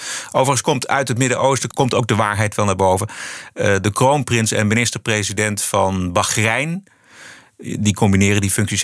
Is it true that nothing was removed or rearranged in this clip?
yes; 0 cuts

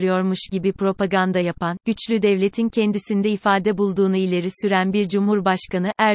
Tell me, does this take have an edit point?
no; 0 cuts

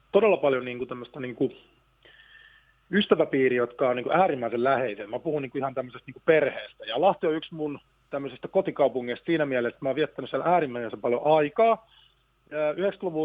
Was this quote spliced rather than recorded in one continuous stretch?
no; 0 cuts

